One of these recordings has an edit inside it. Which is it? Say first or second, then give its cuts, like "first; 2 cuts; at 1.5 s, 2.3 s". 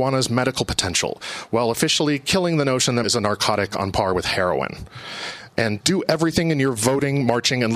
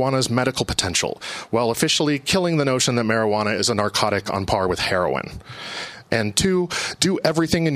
first; 2 cuts; at 3.0 s, 5.8 s